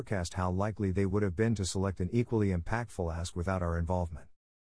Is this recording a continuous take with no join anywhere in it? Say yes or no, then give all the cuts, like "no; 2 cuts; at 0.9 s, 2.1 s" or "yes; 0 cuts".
yes; 0 cuts